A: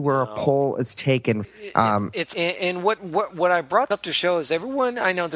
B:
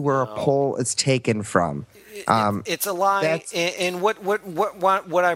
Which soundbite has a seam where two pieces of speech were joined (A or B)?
A